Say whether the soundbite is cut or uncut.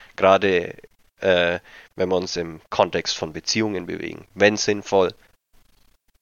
uncut